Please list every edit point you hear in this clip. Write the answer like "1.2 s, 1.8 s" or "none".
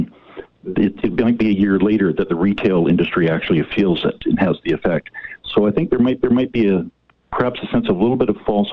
6.2 s